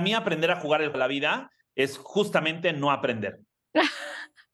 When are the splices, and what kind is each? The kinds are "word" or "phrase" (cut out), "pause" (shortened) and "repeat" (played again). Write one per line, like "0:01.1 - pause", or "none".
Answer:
0:00.9 - word